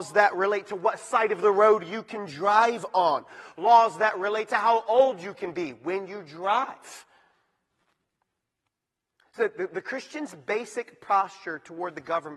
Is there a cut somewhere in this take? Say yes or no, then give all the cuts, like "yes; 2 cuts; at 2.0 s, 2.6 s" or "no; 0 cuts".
no; 0 cuts